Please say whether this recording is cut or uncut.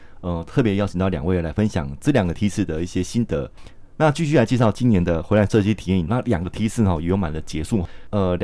cut